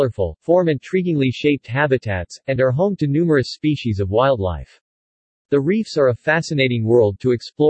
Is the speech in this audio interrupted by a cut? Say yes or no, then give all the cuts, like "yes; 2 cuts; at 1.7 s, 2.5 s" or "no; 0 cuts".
no; 0 cuts